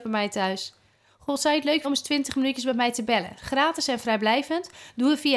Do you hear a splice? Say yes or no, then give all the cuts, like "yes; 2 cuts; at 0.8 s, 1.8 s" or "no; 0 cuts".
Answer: yes; 1 cut; at 1.8 s